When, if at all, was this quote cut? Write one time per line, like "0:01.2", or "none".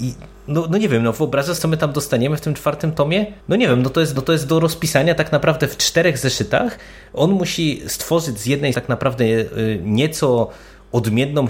0:01.6
0:03.4
0:04.2
0:08.7